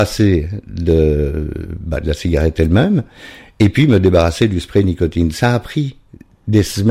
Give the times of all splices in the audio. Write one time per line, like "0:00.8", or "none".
none